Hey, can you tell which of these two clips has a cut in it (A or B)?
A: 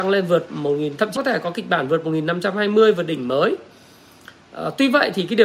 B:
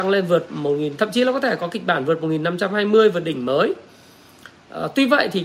A